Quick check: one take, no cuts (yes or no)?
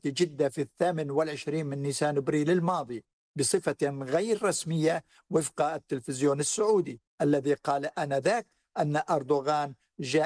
yes